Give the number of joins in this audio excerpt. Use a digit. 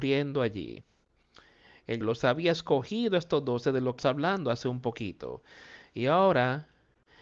2